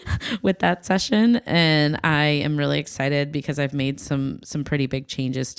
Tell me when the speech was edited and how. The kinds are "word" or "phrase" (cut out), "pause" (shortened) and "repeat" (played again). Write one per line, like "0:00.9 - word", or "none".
none